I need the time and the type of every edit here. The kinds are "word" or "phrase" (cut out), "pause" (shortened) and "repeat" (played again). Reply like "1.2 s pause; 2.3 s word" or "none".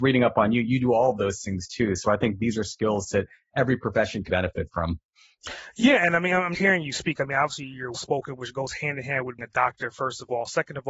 4.3 s word; 6.5 s word; 7.9 s word; 9.4 s word